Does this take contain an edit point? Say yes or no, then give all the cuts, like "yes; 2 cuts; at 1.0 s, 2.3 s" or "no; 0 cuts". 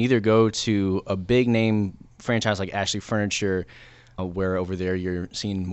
yes; 1 cut; at 4.2 s